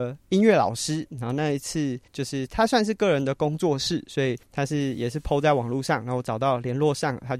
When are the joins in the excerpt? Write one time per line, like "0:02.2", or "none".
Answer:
0:02.1
0:04.4